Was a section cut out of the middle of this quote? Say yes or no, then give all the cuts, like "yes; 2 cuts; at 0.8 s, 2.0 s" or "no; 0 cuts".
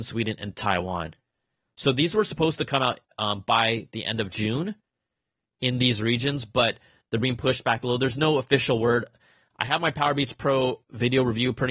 no; 0 cuts